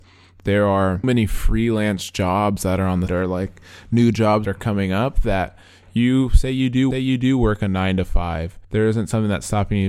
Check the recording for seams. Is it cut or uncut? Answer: cut